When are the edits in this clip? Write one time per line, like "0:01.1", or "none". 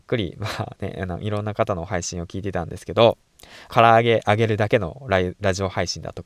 0:03.7

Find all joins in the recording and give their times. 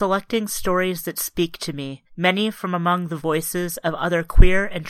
0:02.1

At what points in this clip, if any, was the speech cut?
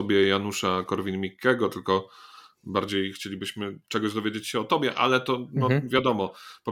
none

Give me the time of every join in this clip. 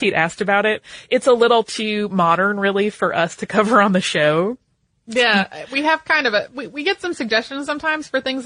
none

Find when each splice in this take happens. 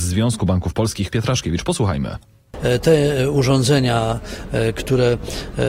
0:01.1

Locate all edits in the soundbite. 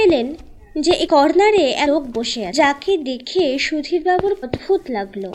0:01.1
0:01.9
0:02.5
0:04.4

